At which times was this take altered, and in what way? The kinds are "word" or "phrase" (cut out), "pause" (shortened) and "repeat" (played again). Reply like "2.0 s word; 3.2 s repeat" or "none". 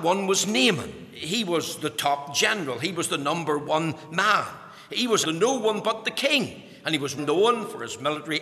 5.2 s word; 7.2 s word